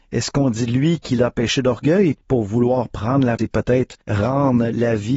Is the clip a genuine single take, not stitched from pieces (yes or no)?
no